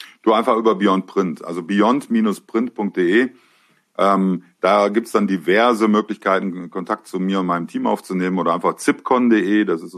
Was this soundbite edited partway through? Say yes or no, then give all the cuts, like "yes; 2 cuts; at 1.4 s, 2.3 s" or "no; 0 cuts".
no; 0 cuts